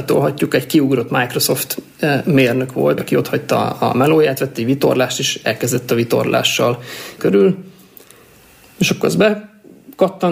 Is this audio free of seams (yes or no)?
no